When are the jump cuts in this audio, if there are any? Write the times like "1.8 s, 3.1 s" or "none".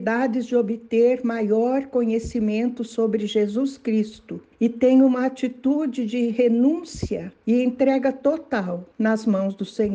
4.5 s, 7.4 s, 8.9 s